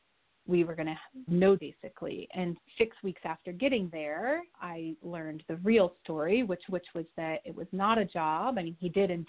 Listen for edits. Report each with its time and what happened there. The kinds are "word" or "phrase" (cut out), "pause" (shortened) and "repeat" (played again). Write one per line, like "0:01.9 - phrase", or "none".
0:01.3 - word
0:01.6 - word
0:02.6 - word
0:04.5 - pause
0:06.7 - repeat

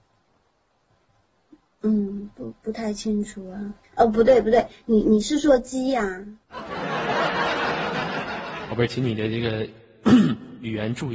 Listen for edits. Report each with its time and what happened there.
0:03.8 - pause
0:06.4 - pause

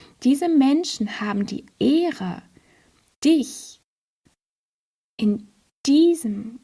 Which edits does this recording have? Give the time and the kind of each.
0:01.7 - word

